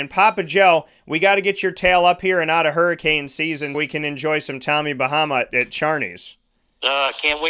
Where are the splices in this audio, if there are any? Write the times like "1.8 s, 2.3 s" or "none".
3.7 s